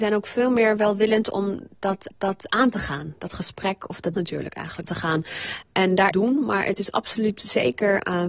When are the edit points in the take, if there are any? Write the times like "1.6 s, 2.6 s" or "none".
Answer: 2.1 s, 4.1 s, 4.8 s, 6.1 s